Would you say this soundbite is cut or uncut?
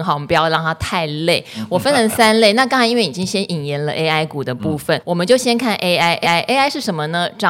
cut